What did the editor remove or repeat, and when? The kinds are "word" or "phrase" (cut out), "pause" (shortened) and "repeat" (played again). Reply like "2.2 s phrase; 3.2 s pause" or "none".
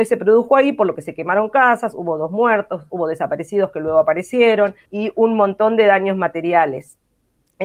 4.8 s pause

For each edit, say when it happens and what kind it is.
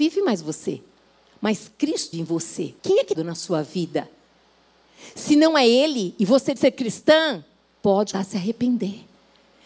2.1 s word; 2.8 s pause; 3.1 s phrase; 6.6 s word; 8.1 s word

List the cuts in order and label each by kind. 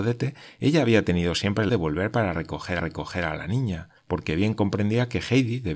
1.7 s phrase; 2.8 s repeat; 4.0 s pause

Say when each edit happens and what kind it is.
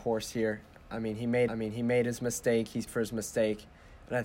1.5 s repeat; 2.9 s word

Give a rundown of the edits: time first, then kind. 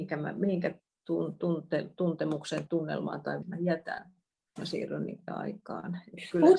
2.7 s word; 3.4 s word; 4.6 s word; 5.3 s word

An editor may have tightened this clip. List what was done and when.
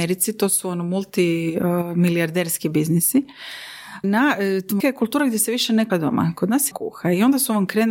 4.0 s word; 4.8 s word; 5.9 s word; 6.7 s phrase

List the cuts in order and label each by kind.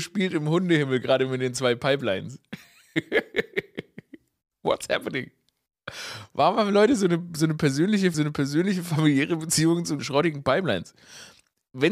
8.1 s word; 10.0 s word

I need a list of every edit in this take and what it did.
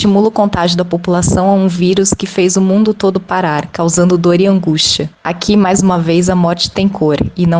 5.1 s pause

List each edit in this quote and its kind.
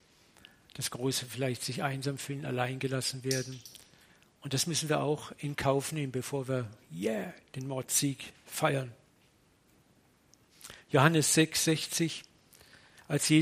none

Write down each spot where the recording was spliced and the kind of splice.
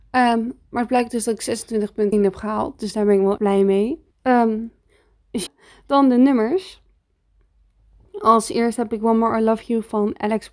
2.1 s phrase; 3.4 s word; 4.1 s pause; 5.5 s word

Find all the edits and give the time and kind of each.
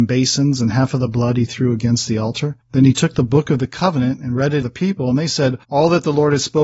2.6 s pause; 4.6 s phrase; 5.6 s pause

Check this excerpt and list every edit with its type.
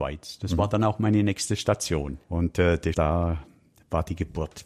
2.2 s pause; 2.9 s word

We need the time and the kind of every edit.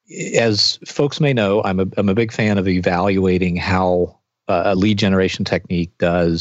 none

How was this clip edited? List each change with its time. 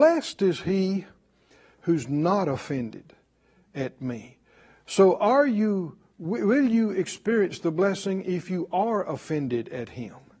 none

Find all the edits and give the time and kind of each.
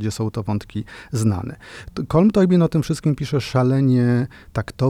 none

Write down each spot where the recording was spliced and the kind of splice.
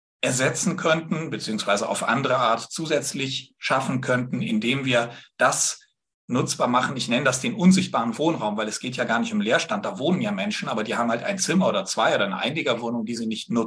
none

